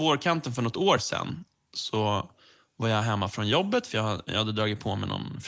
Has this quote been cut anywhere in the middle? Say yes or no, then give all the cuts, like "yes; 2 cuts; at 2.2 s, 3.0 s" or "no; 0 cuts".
no; 0 cuts